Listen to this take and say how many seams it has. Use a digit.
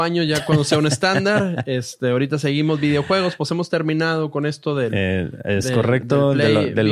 0